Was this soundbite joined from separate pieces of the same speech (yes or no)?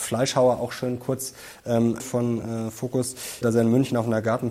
yes